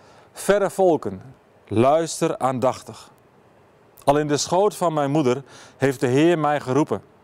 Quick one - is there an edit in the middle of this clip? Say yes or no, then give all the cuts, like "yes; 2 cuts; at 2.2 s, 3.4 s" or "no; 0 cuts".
no; 0 cuts